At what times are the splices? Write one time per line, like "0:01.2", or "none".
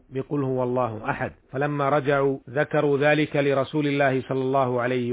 0:01.4
0:02.4